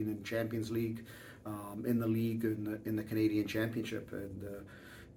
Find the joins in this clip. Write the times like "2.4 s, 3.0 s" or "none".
none